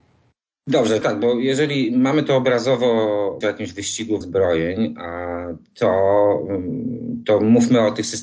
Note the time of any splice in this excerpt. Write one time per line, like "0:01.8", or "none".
0:01.0
0:03.4
0:04.2